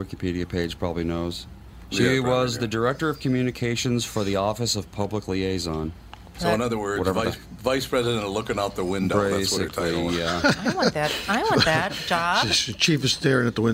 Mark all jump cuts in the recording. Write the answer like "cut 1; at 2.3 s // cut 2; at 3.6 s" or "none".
none